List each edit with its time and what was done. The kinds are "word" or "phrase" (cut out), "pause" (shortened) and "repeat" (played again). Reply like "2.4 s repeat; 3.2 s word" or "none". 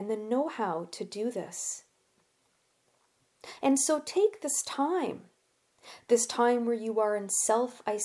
none